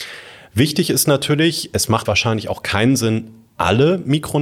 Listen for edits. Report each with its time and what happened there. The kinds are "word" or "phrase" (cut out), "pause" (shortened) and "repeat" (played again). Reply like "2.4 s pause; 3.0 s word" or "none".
2.1 s word